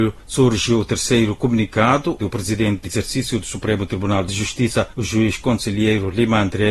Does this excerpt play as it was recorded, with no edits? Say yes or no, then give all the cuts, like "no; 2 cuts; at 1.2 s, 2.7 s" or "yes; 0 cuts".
no; 2 cuts; at 2.2 s, 2.8 s